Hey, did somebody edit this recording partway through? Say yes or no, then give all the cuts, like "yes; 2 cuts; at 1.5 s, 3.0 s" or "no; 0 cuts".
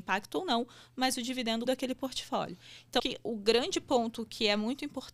yes; 2 cuts; at 1.7 s, 3.0 s